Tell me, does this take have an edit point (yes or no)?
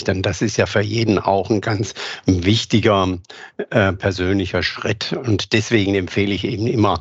no